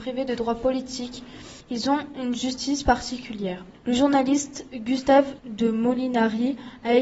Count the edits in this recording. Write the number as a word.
one